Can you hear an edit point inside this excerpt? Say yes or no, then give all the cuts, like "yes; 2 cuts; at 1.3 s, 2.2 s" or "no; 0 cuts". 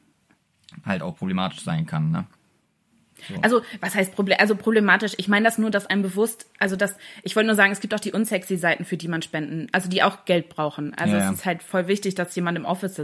no; 0 cuts